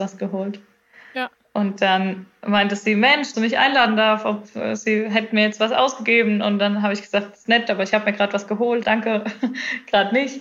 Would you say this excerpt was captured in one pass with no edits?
no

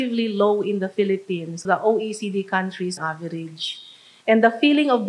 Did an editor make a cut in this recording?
yes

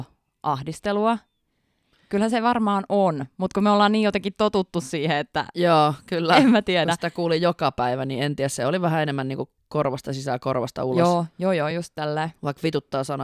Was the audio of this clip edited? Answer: no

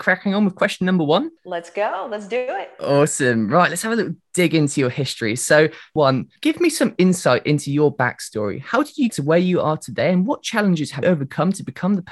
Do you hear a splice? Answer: yes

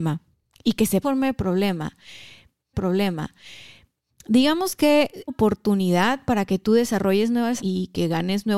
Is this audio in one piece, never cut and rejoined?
no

